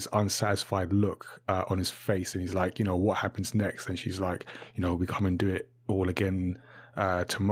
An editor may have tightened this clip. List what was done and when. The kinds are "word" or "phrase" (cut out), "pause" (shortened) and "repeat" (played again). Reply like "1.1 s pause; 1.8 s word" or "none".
none